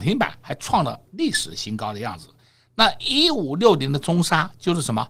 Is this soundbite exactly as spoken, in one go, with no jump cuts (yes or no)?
yes